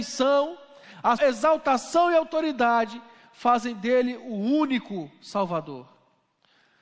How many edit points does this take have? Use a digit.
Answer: 1